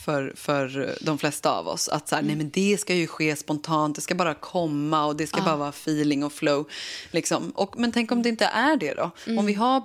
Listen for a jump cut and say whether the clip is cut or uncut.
uncut